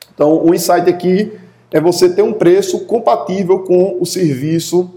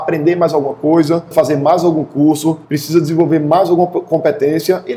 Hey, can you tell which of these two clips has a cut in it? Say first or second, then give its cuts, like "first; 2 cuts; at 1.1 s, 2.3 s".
second; 2 cuts; at 1.3 s, 2.6 s